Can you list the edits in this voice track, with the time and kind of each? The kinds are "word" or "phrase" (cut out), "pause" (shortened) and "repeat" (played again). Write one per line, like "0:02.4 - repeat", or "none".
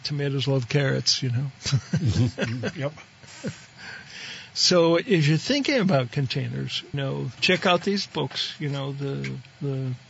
0:06.9 - word
0:07.4 - word